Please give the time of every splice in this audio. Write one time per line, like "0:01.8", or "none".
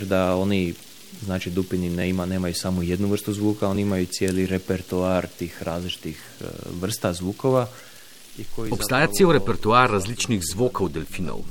none